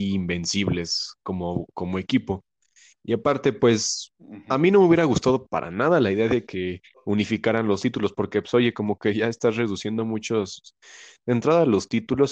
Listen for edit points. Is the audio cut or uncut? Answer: uncut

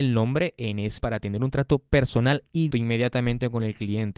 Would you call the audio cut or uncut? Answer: cut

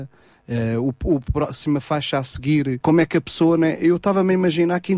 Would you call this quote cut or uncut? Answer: cut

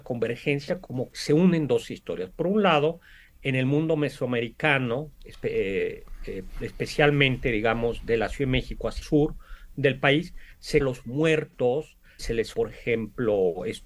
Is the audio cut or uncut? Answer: cut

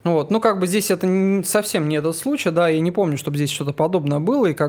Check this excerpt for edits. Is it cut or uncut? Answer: uncut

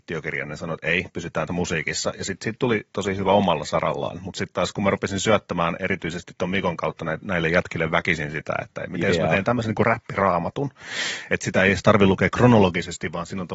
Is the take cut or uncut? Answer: cut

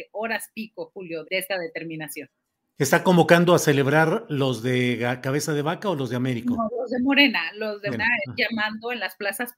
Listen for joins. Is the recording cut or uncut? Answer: cut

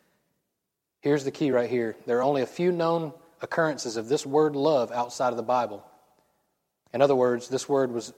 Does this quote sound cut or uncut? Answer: uncut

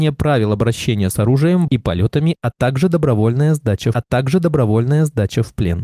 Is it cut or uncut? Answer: cut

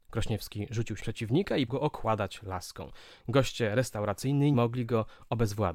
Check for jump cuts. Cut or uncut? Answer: cut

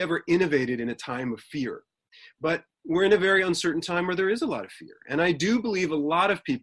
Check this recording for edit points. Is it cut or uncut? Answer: uncut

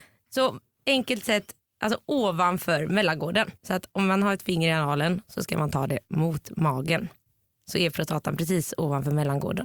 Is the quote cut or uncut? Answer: cut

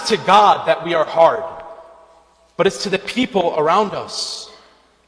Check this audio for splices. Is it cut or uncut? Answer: uncut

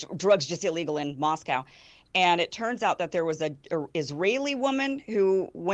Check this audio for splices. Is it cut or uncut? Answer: uncut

